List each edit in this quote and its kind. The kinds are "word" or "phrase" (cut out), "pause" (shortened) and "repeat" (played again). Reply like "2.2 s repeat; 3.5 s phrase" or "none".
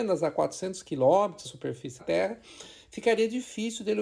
1.4 s word; 2.0 s word